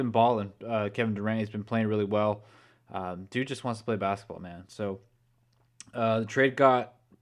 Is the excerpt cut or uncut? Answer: uncut